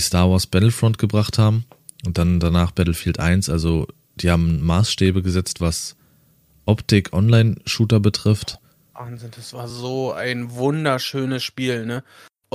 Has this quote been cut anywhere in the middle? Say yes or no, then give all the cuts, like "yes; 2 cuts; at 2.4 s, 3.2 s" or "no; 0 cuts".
no; 0 cuts